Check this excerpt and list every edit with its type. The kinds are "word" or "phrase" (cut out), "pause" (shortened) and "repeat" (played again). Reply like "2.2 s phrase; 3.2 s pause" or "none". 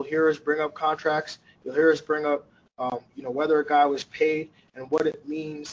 none